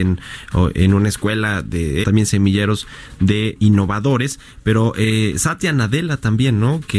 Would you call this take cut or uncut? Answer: cut